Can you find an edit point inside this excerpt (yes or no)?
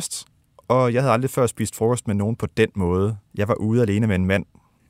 yes